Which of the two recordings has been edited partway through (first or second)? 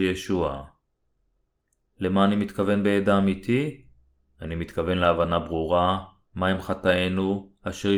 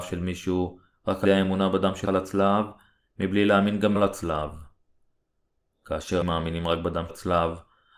second